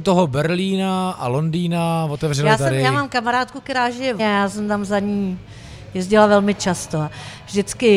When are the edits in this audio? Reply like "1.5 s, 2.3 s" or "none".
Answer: 4.2 s